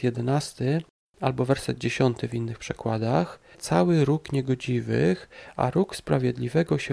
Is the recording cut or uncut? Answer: cut